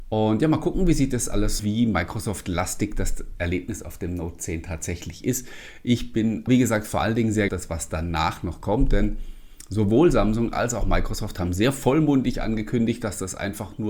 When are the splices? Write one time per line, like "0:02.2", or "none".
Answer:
0:01.6
0:06.5
0:07.5